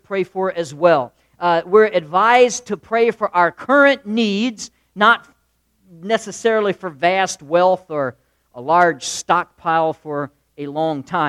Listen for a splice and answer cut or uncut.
uncut